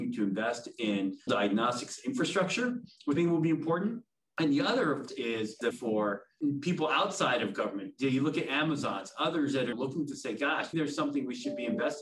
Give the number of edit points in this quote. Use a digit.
6